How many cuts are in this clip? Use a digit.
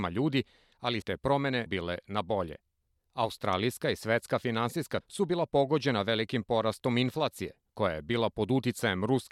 3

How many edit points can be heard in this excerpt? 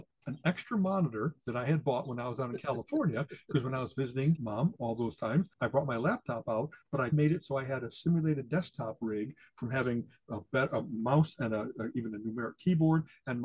1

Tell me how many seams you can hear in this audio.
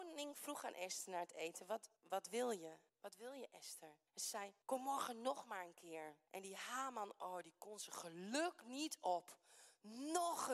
5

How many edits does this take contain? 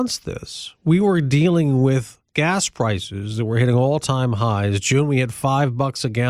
1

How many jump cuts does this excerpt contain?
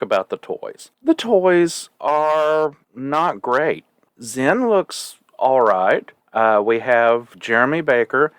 4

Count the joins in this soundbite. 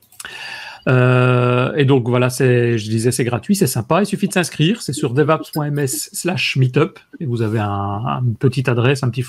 0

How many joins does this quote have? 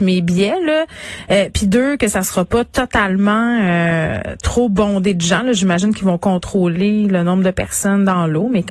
0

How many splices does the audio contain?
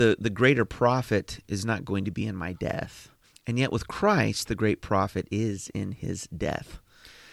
1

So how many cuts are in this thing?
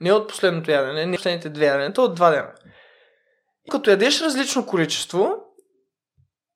2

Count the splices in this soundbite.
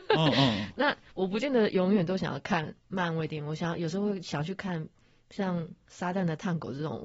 0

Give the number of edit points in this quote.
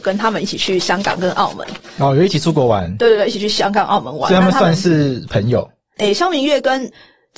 0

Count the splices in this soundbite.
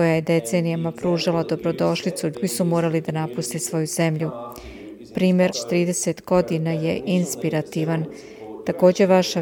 2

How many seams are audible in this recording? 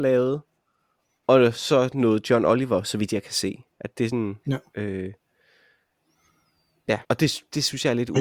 2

